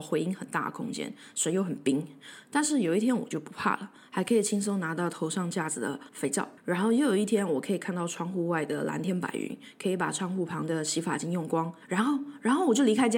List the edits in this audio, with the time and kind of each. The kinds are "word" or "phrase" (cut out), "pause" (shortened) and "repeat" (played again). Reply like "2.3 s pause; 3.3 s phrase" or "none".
6.1 s pause; 6.6 s pause; 11.8 s pause